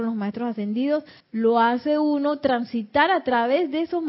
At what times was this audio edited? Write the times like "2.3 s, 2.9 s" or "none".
1.2 s